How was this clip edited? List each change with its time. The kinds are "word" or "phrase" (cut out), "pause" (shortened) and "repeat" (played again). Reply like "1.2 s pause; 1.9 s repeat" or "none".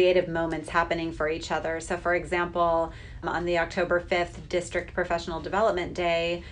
3.2 s word